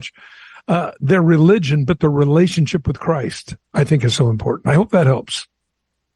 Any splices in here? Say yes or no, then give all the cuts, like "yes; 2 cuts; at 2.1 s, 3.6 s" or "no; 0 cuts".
no; 0 cuts